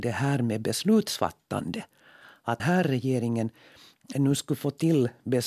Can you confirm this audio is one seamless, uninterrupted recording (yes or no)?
no